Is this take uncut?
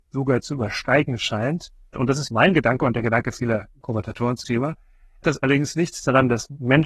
no; 5 cuts; at 1.9 s, 2.3 s, 3.8 s, 4.4 s, 5.2 s

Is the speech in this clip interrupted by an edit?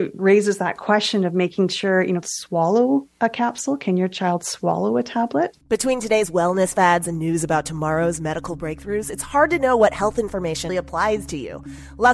yes; 3 cuts; at 2.2 s, 5.6 s, 10.7 s

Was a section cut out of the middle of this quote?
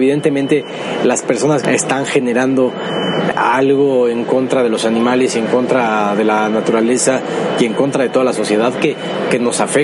yes; 2 cuts; at 1.6 s, 3.3 s

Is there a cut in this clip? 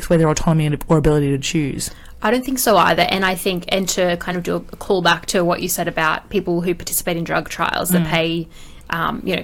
no; 0 cuts

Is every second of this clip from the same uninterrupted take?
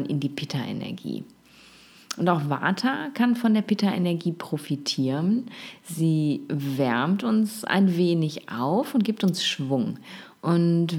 yes; 0 cuts

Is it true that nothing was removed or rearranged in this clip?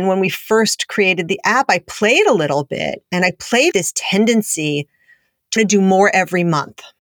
no; 2 cuts; at 3.7 s, 5.6 s

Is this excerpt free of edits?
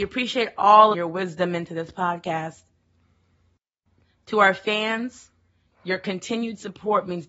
no; 1 cut; at 0.9 s

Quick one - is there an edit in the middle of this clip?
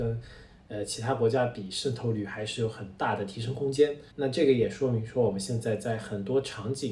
yes; 1 cut; at 4.1 s

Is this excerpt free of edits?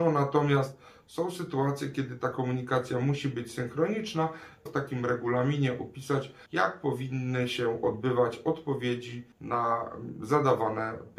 no; 3 cuts; at 4.7 s, 6.5 s, 9.3 s

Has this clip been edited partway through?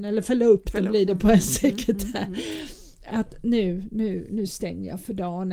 no; 0 cuts

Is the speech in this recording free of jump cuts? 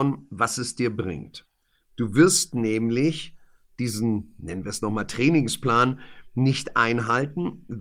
yes; 0 cuts

